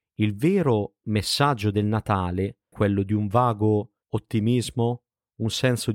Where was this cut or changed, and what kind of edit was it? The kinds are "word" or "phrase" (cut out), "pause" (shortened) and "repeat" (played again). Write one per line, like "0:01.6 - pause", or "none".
0:02.7 - phrase
0:04.0 - pause